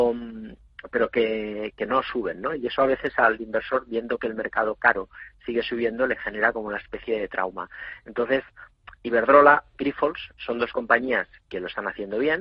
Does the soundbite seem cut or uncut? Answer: uncut